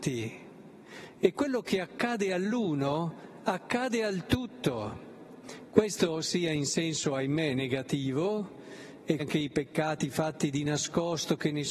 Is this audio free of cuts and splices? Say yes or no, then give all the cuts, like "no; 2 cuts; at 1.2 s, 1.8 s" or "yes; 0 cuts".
no; 1 cut; at 9.2 s